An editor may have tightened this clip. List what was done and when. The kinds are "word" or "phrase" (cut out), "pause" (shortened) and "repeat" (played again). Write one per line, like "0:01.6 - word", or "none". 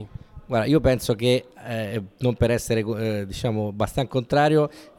none